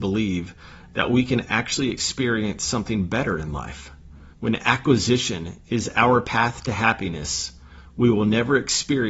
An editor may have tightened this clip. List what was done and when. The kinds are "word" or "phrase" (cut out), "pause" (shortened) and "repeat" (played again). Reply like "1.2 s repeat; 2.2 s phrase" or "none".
4.3 s pause